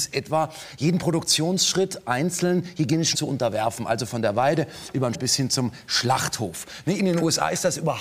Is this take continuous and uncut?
no; 2 cuts; at 3.1 s, 5.1 s

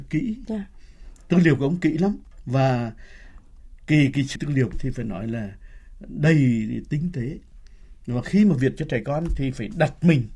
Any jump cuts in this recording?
yes; 2 cuts; at 4.4 s, 4.7 s

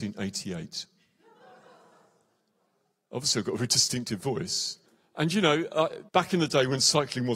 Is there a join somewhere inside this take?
yes; 2 cuts; at 4.9 s, 6.1 s

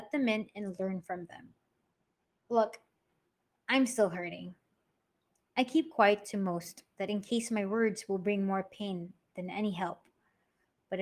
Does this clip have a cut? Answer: no; 0 cuts

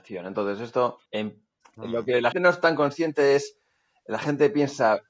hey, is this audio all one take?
no; 2 cuts; at 1.1 s, 2.3 s

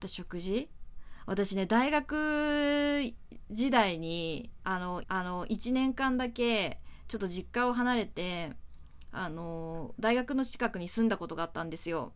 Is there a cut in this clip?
yes; 1 cut; at 5.0 s

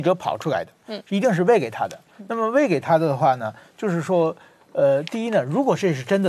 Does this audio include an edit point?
no; 0 cuts

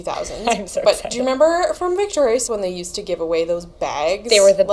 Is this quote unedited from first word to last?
no; 1 cut; at 2.5 s

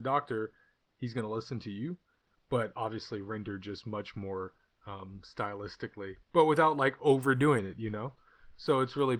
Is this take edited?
yes; 1 cut; at 6.2 s

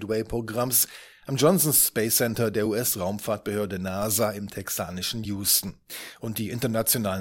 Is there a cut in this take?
no; 0 cuts

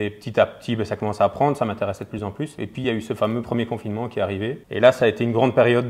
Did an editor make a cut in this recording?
no; 0 cuts

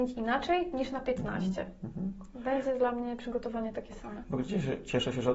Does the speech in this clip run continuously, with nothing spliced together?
yes; 0 cuts

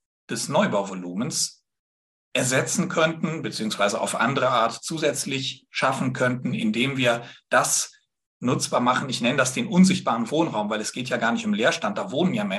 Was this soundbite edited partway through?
no; 0 cuts

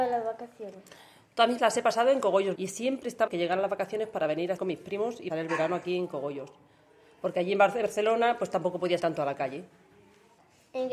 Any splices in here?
yes; 6 cuts; at 1.6 s, 2.5 s, 3.3 s, 4.6 s, 5.3 s, 9.0 s

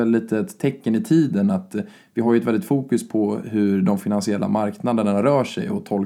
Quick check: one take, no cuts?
yes; 0 cuts

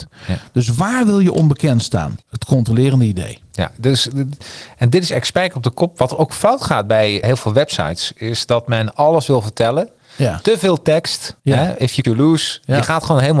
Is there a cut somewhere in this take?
yes; 4 cuts; at 2.2 s, 7.2 s, 11.4 s, 12.0 s

